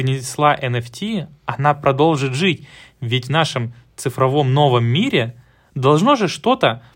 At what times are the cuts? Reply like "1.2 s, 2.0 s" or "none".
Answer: none